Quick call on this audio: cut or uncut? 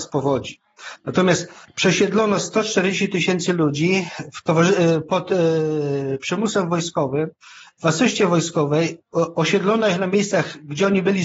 uncut